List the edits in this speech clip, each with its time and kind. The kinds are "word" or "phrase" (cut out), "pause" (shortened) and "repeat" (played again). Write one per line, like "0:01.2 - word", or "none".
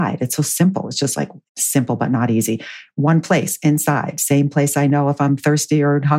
0:01.5 - pause